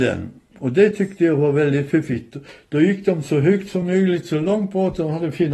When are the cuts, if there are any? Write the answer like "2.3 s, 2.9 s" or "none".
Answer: none